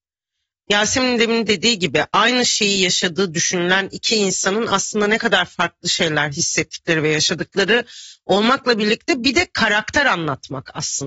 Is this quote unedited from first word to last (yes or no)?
yes